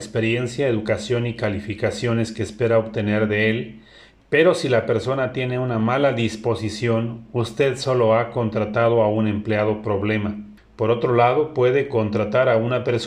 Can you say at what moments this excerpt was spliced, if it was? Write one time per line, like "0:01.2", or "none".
0:10.6